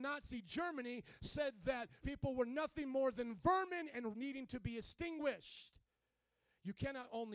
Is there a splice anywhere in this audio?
yes; 2 cuts; at 2.0 s, 4.1 s

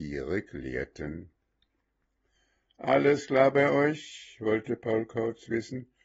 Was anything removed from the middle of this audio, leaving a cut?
no; 0 cuts

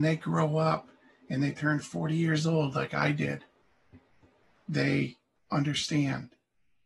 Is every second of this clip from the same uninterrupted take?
yes; 0 cuts

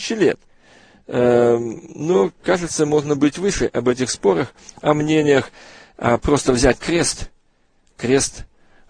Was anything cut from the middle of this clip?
no; 0 cuts

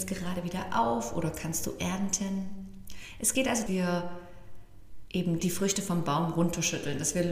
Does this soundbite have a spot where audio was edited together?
yes; 2 cuts; at 3.7 s, 5.4 s

